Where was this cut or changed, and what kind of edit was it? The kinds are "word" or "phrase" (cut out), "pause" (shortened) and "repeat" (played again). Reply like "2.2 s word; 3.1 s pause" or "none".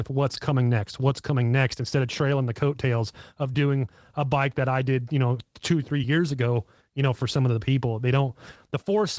none